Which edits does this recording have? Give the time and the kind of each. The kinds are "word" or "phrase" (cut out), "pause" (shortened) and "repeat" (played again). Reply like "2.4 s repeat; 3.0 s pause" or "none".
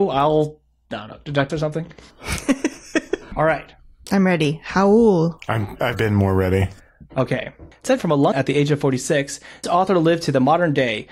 1.5 s word; 5.9 s word; 8.0 s word; 8.3 s word; 9.6 s word